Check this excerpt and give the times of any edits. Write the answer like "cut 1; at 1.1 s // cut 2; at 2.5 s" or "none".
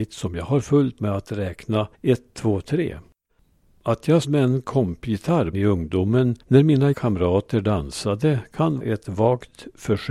cut 1; at 1.0 s // cut 2; at 1.9 s // cut 3; at 3.3 s // cut 4; at 4.2 s // cut 5; at 5.5 s // cut 6; at 6.4 s // cut 7; at 6.9 s // cut 8; at 8.8 s